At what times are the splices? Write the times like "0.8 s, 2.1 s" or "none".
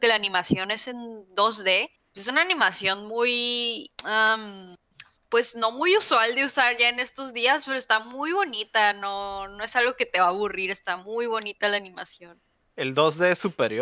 2.0 s, 3.9 s